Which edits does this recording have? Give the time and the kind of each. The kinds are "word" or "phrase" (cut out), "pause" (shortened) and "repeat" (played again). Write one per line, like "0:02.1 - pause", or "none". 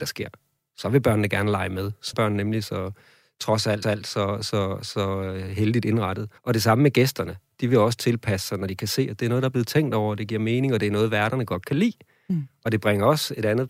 0:02.1 - word
0:03.8 - repeat
0:06.4 - pause